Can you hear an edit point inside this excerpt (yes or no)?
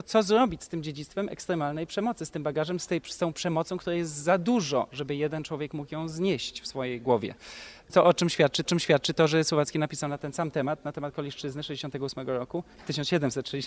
yes